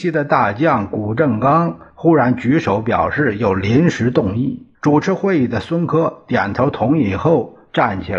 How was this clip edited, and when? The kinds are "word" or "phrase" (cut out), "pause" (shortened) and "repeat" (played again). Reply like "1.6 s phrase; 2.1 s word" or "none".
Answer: 4.7 s pause